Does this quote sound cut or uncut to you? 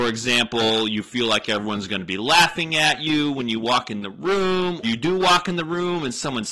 cut